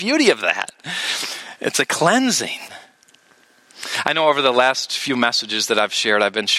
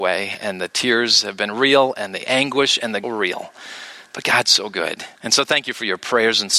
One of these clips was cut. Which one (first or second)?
second